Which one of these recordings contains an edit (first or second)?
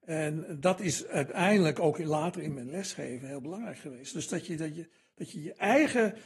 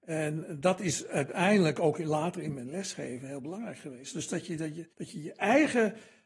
second